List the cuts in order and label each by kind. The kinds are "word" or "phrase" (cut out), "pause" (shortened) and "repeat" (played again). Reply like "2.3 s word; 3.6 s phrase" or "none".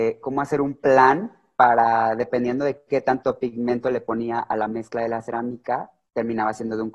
none